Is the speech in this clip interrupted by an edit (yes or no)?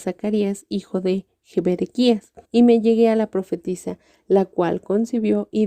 yes